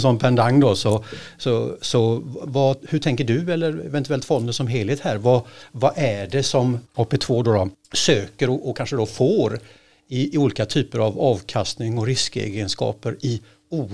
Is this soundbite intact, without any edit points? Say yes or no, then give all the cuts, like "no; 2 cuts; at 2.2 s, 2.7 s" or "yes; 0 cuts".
yes; 0 cuts